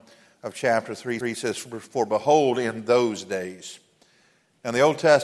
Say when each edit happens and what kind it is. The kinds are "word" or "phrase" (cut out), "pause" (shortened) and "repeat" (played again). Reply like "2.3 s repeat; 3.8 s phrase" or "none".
1.2 s repeat